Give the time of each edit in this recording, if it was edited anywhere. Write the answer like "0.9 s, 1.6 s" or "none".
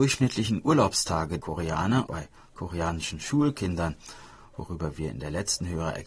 1.4 s, 2.1 s